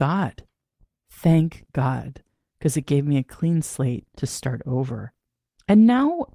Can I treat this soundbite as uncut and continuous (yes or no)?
no